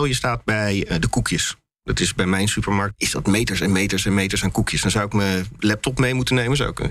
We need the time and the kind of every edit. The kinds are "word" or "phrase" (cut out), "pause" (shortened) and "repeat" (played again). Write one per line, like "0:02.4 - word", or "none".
none